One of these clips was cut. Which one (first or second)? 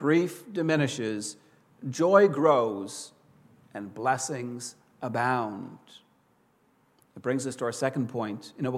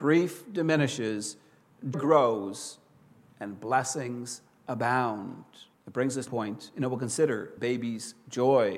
second